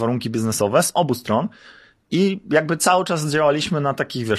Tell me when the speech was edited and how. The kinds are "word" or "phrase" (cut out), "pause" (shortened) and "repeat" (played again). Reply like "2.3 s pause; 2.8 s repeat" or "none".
none